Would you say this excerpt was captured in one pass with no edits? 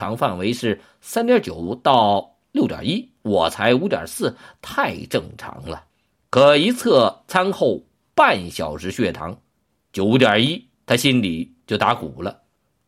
no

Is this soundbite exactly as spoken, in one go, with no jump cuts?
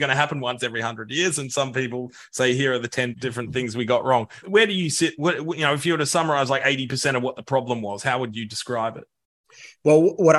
no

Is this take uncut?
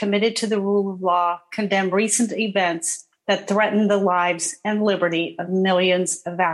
yes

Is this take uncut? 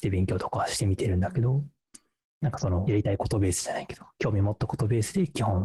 yes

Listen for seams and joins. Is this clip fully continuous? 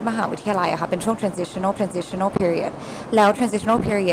no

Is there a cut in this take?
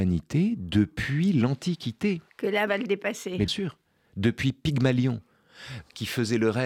yes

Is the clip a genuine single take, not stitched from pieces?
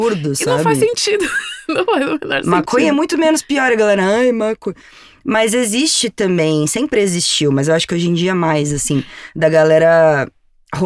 yes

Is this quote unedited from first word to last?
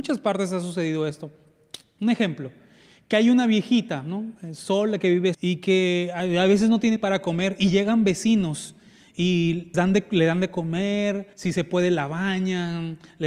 no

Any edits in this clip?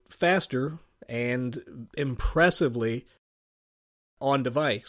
no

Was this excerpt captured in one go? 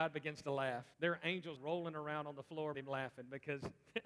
no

